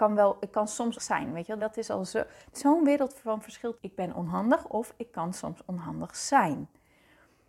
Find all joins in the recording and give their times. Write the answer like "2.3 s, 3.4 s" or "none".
0.9 s, 1.6 s, 2.5 s, 3.8 s